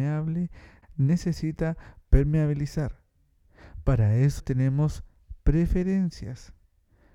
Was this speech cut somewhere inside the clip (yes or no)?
no